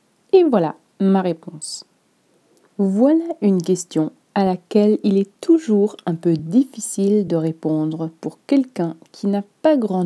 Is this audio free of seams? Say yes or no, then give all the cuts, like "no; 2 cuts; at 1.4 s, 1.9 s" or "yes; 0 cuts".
yes; 0 cuts